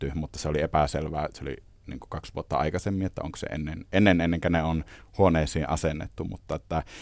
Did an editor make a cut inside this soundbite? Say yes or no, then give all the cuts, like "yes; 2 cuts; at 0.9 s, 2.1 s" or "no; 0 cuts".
no; 0 cuts